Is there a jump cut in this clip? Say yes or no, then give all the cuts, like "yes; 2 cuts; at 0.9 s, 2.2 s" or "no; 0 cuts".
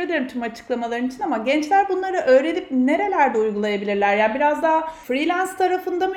no; 0 cuts